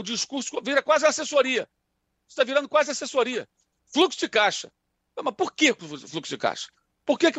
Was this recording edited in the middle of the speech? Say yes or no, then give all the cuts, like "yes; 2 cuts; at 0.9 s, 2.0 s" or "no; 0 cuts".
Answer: no; 0 cuts